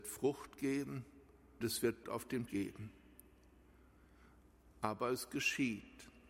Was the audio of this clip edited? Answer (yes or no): yes